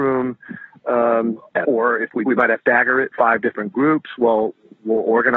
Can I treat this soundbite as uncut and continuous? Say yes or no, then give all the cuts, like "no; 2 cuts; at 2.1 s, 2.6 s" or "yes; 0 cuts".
no; 4 cuts; at 1.6 s, 2.3 s, 2.6 s, 3.1 s